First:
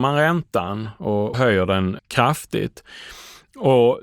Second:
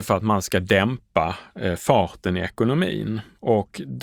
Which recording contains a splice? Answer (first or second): first